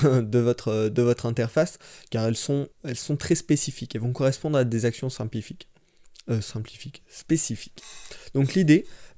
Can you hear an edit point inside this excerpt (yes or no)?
yes